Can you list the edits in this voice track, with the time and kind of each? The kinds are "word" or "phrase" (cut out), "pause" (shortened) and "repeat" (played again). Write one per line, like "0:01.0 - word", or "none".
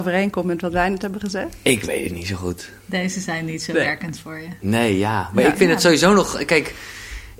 none